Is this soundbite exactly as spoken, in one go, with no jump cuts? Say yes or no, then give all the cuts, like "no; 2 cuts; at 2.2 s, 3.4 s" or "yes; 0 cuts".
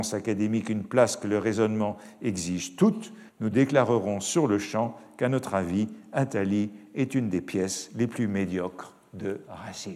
no; 1 cut; at 3.3 s